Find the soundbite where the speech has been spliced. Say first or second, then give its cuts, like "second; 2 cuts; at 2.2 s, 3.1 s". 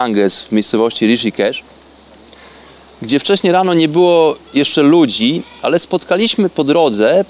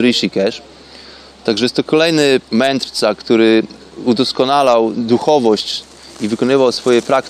second; 2 cuts; at 2.4 s, 4.9 s